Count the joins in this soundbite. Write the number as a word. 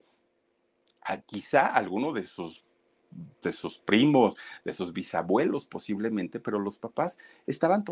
one